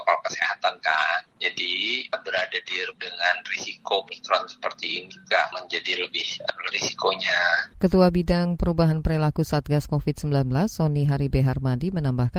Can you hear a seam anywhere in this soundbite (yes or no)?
yes